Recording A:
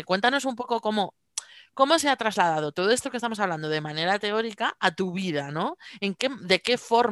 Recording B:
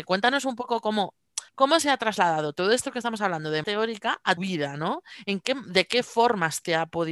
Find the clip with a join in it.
B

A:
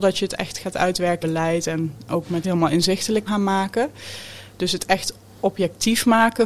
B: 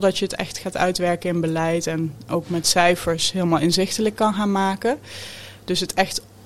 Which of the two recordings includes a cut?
A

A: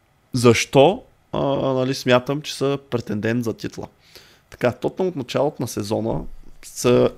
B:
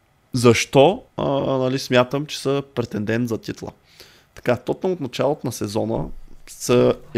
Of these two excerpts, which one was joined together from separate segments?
B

